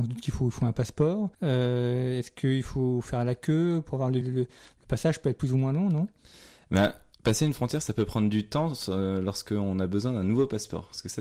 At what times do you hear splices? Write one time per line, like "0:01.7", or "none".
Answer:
0:01.3
0:04.2
0:07.1